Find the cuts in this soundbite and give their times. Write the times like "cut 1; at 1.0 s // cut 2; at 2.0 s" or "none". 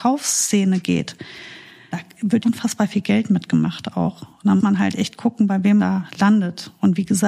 cut 1; at 1.9 s // cut 2; at 2.4 s // cut 3; at 4.6 s // cut 4; at 5.8 s